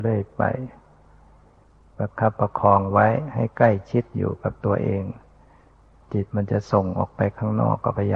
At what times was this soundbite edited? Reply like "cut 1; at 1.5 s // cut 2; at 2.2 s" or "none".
none